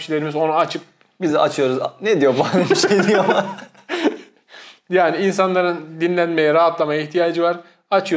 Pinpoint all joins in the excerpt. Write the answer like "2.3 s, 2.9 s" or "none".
none